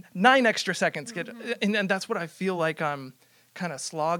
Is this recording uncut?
yes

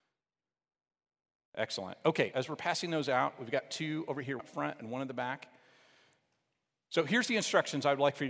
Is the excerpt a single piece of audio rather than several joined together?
no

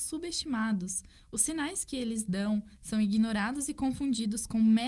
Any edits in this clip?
no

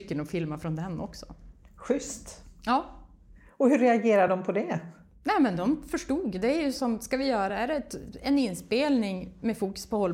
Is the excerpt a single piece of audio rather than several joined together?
yes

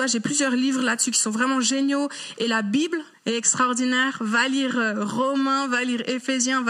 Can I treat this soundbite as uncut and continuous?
no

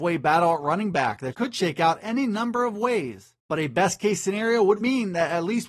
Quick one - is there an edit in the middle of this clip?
yes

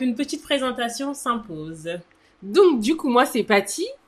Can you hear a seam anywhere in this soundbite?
no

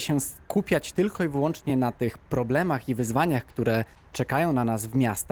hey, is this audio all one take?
yes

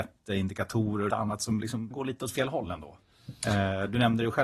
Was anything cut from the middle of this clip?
yes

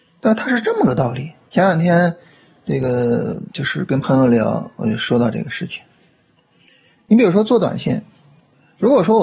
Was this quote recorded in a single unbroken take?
no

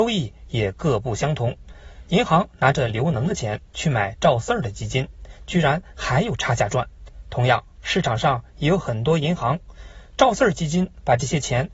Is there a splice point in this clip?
no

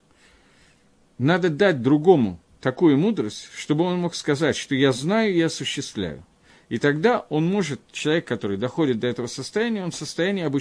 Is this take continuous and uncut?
yes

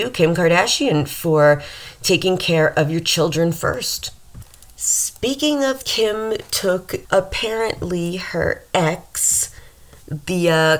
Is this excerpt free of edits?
no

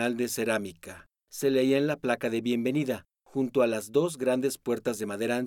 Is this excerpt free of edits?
yes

